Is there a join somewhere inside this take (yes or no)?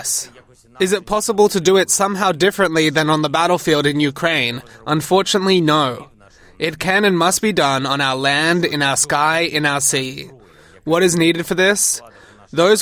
no